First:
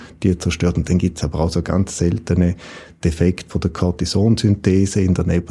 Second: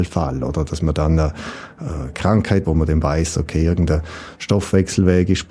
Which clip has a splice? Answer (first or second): second